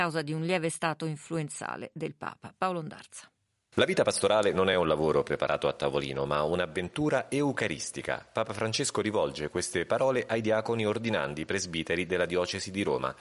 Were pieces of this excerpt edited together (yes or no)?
no